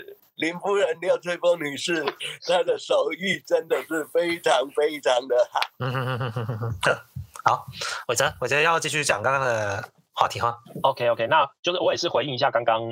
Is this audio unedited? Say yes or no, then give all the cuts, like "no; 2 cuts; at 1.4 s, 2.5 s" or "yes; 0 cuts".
yes; 0 cuts